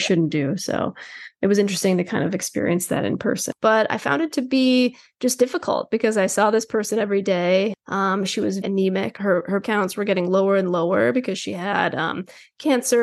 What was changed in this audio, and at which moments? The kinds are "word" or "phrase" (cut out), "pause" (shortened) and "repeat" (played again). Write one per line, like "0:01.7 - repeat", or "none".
0:08.6 - word
0:09.6 - word